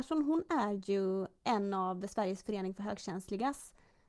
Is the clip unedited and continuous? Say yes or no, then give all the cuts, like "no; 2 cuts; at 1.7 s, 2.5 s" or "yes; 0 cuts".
yes; 0 cuts